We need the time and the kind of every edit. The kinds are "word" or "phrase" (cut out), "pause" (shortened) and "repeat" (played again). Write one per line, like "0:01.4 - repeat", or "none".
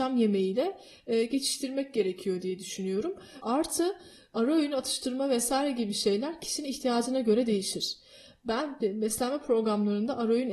none